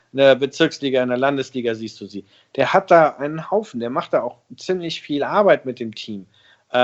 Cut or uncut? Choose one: uncut